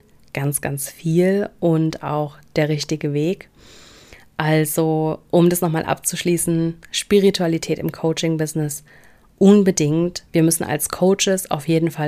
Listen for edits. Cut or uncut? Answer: uncut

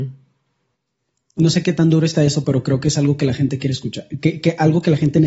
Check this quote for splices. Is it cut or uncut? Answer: uncut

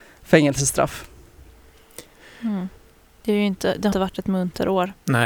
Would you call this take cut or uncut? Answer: cut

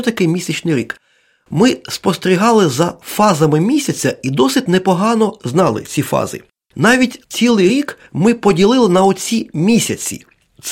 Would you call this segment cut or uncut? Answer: uncut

